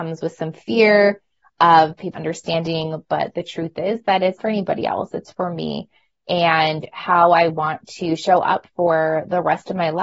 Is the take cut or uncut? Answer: cut